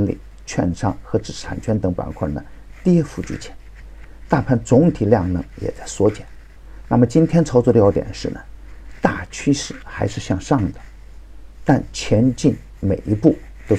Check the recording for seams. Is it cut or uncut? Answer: uncut